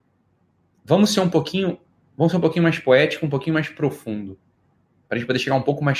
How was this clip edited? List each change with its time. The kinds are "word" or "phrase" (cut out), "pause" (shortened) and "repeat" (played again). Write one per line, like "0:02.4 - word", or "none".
none